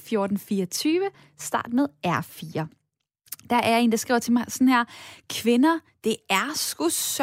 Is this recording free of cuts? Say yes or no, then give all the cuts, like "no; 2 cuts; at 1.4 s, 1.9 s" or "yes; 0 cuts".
yes; 0 cuts